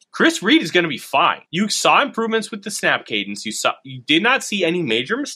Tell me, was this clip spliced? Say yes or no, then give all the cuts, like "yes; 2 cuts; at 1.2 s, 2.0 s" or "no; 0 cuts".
yes; 1 cut; at 1.5 s